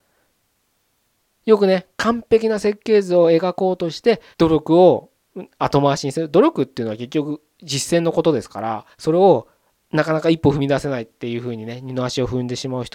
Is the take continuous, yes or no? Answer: no